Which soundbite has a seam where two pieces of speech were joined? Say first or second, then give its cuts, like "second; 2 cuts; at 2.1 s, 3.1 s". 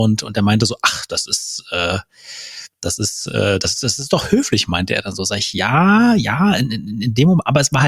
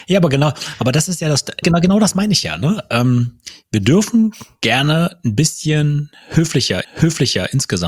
second; 2 cuts; at 1.6 s, 6.8 s